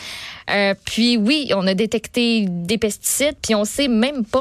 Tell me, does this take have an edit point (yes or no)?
no